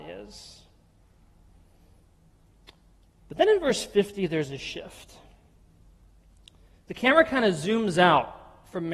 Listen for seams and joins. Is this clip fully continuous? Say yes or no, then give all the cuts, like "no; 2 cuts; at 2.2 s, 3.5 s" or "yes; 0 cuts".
yes; 0 cuts